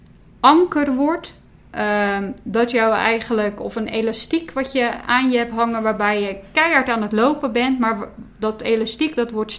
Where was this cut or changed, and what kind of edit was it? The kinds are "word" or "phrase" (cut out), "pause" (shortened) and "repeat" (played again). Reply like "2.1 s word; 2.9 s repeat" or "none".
none